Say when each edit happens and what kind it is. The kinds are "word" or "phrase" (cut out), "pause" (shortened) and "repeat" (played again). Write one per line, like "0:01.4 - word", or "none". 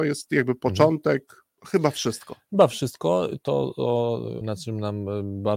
0:01.6 - pause
0:04.4 - word